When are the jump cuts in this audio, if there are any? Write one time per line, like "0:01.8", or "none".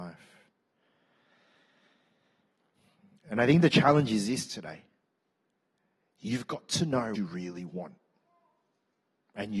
0:07.2